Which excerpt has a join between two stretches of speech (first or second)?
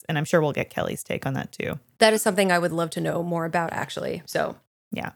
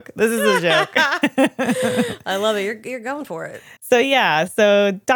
second